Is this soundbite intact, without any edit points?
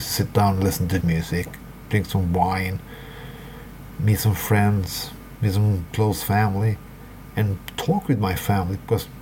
no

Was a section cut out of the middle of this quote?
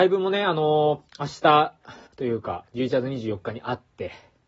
yes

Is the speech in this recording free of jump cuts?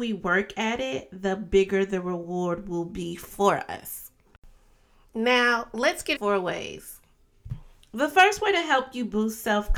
no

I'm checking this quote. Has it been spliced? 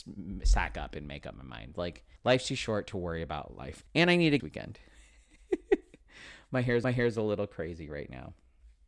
yes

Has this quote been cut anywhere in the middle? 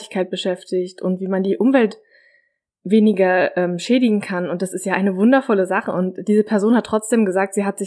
no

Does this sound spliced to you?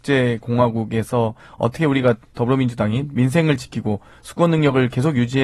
no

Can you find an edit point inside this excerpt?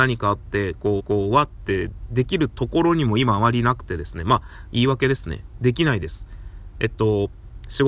yes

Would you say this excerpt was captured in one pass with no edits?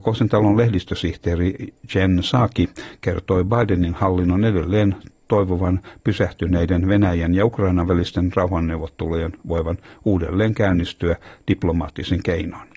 yes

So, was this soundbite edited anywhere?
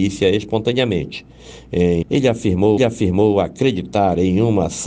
yes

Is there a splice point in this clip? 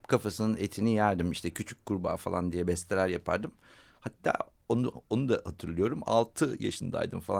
no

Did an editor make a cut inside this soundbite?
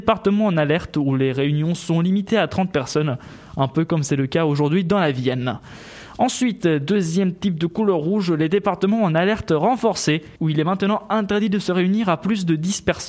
yes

